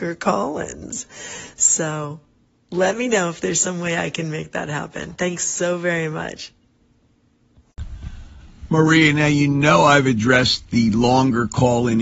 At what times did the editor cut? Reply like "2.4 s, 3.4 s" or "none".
none